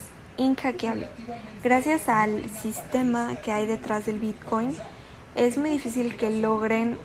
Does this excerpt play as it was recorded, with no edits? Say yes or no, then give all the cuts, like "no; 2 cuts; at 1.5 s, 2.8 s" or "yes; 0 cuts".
yes; 0 cuts